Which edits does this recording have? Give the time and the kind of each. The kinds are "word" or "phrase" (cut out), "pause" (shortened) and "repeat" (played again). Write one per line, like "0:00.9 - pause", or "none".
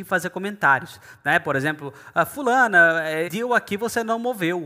0:03.3 - word